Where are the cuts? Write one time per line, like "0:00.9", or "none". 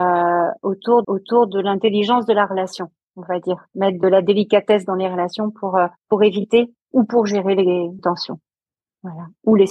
0:01.0
0:06.0
0:08.0